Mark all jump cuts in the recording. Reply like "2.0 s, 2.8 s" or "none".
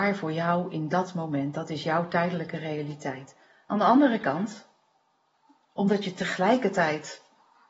none